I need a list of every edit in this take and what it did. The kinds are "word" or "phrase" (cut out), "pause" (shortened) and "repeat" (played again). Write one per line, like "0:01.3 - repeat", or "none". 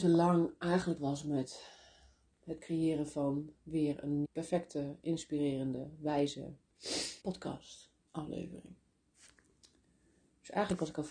0:01.0 - phrase
0:04.2 - word
0:07.2 - pause